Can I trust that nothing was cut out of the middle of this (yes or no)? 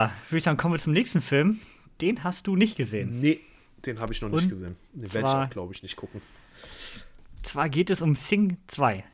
yes